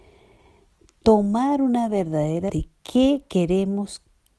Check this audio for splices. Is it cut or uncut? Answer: cut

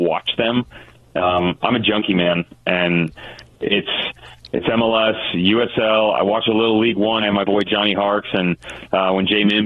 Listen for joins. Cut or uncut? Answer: cut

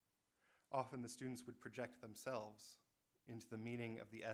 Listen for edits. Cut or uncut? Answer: uncut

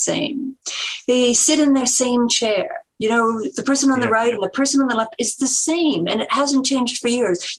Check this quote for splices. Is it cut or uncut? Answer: uncut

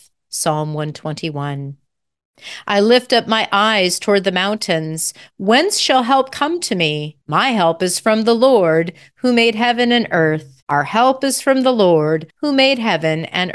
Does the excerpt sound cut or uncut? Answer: cut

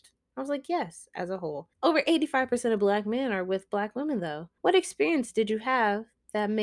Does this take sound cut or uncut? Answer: cut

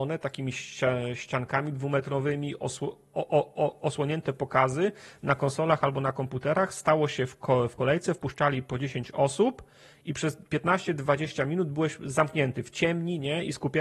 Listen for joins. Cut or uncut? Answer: uncut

